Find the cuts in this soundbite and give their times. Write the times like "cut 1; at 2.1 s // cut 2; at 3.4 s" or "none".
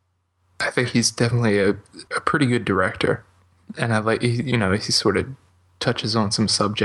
cut 1; at 2.1 s